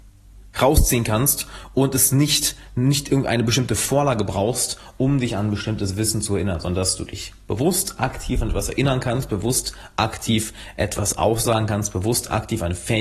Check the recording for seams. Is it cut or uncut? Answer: uncut